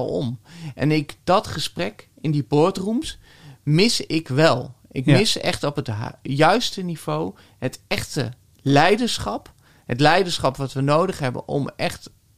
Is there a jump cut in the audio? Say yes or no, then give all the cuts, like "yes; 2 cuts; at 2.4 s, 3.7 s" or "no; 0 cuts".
no; 0 cuts